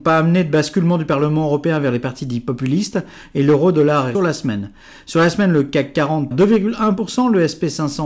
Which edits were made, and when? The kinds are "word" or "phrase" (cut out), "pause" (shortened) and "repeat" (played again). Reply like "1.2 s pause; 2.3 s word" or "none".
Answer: 4.1 s phrase; 6.3 s word